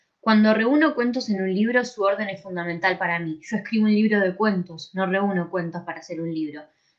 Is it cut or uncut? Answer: uncut